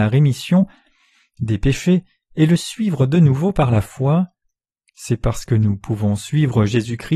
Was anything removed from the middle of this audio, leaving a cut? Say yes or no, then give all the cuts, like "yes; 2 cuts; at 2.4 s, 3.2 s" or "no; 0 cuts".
no; 0 cuts